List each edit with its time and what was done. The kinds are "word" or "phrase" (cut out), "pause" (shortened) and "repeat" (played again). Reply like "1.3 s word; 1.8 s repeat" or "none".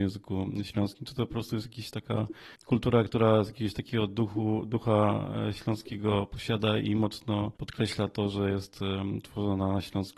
2.5 s pause; 7.6 s pause